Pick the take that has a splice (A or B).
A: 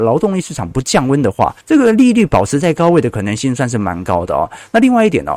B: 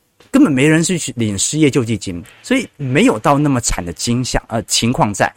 A